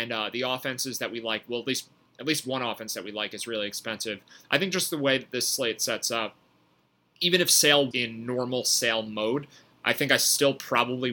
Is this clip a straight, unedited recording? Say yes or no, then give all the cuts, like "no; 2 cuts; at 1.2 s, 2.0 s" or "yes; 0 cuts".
no; 1 cut; at 7.9 s